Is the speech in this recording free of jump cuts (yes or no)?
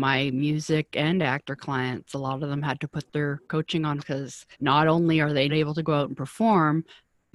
no